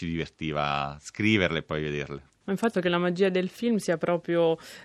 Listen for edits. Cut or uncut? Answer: cut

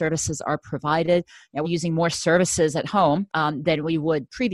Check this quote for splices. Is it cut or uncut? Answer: cut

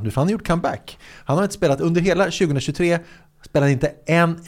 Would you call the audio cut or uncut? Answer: uncut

